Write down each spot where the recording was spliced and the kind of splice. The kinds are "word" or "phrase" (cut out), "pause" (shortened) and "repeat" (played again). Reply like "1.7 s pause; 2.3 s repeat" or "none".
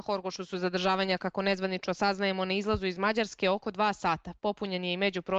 none